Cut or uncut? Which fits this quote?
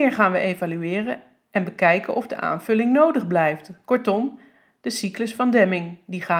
uncut